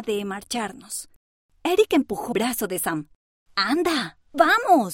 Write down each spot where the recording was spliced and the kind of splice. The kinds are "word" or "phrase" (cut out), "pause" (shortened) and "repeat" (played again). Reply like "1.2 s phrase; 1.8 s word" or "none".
2.3 s word